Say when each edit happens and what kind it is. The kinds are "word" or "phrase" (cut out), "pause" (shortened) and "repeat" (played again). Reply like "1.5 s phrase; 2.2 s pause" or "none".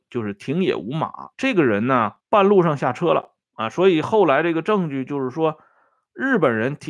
1.3 s pause; 2.2 s pause; 3.4 s pause